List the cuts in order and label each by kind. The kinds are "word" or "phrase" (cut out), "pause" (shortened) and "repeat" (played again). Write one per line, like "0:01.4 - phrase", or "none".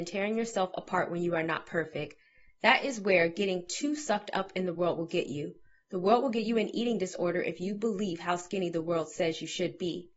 none

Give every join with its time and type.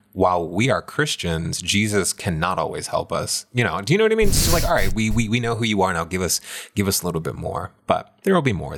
none

